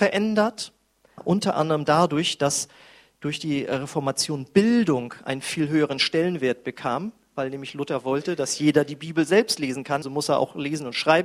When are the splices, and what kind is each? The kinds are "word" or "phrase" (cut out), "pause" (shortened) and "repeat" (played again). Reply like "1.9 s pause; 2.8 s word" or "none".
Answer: 1.2 s word; 10.0 s word